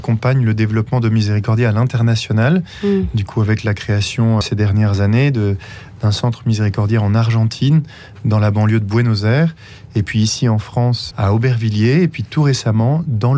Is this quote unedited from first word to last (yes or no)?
no